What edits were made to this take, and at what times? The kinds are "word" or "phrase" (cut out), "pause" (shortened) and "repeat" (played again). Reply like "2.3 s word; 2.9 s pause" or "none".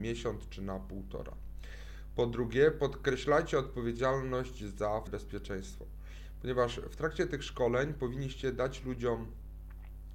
5.1 s word